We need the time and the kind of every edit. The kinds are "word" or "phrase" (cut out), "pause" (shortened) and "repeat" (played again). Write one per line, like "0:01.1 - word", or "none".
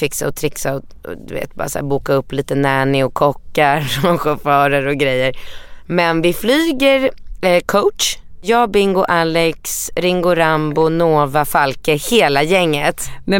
none